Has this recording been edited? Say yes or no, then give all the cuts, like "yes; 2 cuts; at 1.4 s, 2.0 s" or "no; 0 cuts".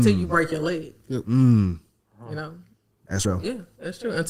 yes; 1 cut; at 3.2 s